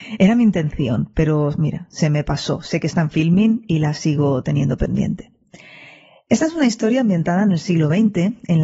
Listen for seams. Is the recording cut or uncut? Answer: uncut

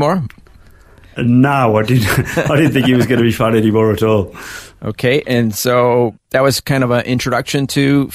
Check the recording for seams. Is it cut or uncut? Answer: uncut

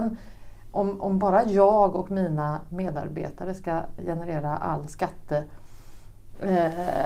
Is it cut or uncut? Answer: cut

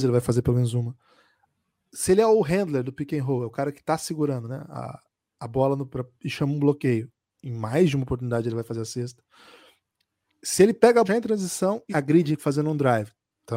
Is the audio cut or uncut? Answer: cut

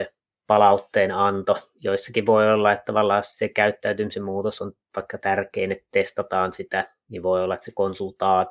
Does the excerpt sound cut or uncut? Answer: uncut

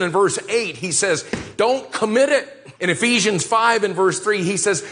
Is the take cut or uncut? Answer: cut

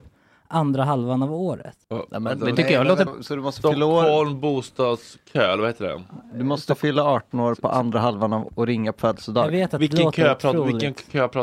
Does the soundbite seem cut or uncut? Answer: cut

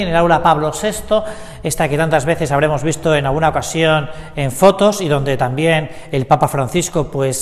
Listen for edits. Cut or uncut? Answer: uncut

